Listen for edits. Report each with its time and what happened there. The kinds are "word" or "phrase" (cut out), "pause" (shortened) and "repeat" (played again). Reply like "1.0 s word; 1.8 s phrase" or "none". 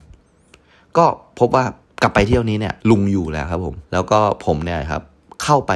1.8 s pause; 2.8 s pause; 3.8 s pause